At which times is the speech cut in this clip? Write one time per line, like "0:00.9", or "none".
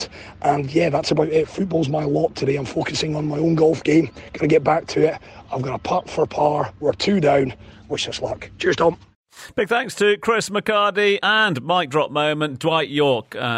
0:11.2

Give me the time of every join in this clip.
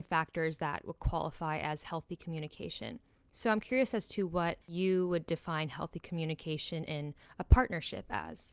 0:04.6

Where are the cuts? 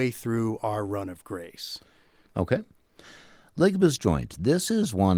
0:04.0

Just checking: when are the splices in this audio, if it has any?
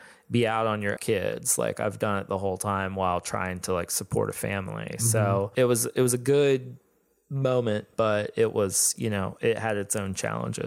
0:01.0

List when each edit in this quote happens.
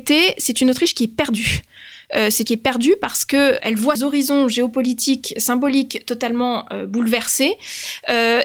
0:02.5
0:03.6
0:04.0

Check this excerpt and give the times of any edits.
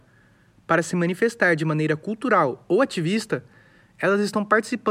none

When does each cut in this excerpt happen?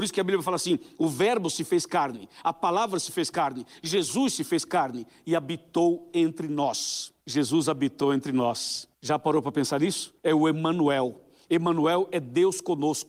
0:07.2
0:08.9
0:10.2

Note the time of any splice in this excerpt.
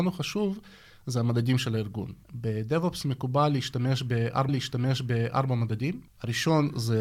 0:02.2
0:04.5

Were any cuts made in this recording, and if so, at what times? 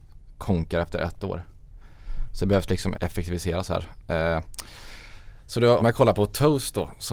0:02.9
0:05.8

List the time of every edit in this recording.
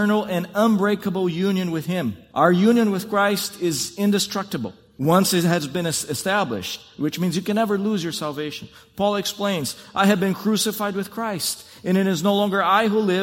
none

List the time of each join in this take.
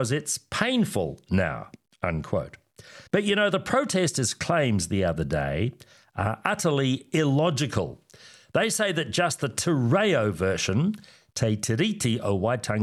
0:03.1

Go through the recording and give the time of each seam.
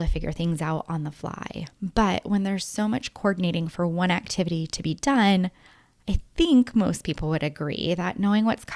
none

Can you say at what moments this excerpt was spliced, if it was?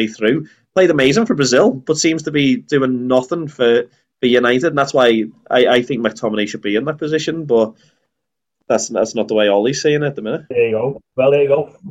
none

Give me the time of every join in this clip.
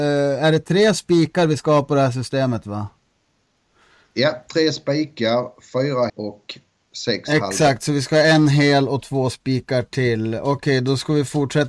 0:06.1

